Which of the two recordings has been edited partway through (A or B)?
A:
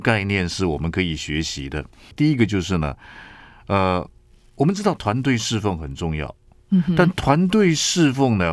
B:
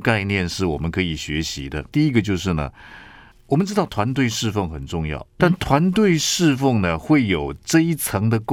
B